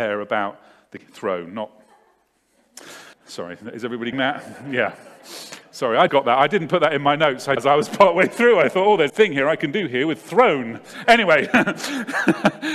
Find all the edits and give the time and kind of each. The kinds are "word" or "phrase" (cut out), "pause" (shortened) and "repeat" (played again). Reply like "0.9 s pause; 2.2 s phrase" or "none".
1.0 s word; 3.1 s pause; 4.1 s word; 6.1 s word; 7.6 s phrase; 9.1 s phrase